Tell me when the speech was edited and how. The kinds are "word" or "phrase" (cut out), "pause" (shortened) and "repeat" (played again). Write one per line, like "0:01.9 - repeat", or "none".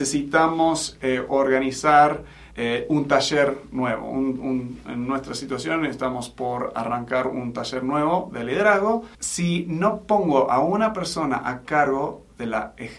0:02.5 - pause
0:09.1 - pause